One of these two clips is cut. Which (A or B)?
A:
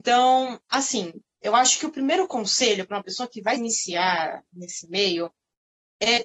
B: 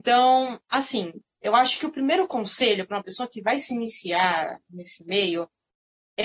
A